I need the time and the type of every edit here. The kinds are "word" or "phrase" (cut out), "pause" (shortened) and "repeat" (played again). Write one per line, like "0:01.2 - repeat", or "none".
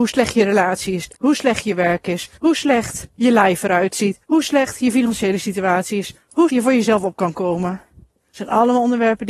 0:01.1 - pause
0:02.4 - pause
0:03.1 - pause
0:04.2 - pause
0:06.5 - word